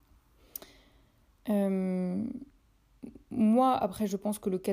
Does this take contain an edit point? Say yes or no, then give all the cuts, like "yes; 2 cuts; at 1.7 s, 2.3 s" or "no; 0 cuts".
no; 0 cuts